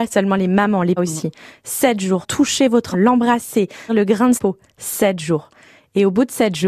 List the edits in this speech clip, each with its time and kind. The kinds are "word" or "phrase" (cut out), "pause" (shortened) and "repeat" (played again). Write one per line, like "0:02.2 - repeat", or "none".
0:01.0 - word
0:02.2 - word
0:02.9 - word
0:03.9 - word
0:04.4 - word